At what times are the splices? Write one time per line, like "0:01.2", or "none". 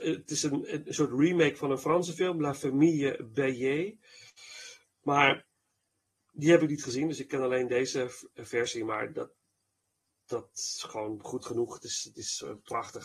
none